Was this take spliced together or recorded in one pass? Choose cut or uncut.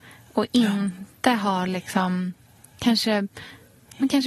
uncut